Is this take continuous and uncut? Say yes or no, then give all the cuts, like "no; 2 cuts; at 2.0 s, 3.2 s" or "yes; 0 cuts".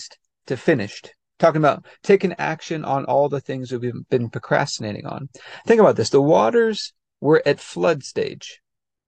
yes; 0 cuts